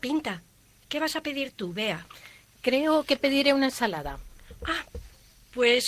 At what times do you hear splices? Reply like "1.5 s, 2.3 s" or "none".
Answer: none